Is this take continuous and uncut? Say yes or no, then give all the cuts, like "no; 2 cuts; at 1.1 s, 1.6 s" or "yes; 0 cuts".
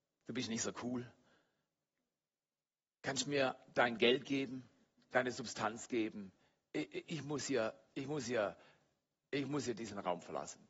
yes; 0 cuts